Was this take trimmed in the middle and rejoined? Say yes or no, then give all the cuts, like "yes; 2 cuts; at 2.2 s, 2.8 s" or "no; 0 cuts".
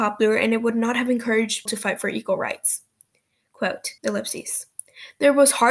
yes; 2 cuts; at 1.7 s, 4.0 s